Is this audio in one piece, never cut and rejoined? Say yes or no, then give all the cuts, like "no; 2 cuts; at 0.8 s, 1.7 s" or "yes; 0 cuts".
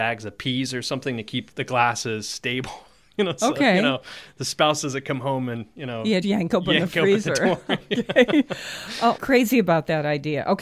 no; 3 cuts; at 1.5 s, 6.2 s, 9.2 s